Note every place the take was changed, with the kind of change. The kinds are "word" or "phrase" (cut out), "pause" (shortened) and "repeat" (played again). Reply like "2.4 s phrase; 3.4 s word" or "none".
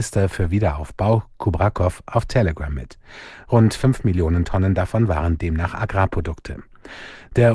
none